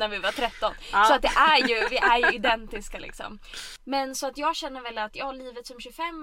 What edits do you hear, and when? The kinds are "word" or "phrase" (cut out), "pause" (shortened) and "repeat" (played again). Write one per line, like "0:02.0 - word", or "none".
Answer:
none